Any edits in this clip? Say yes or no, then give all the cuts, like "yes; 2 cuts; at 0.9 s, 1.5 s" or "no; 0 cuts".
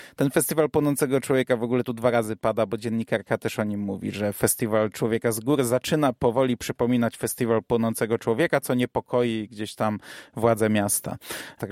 no; 0 cuts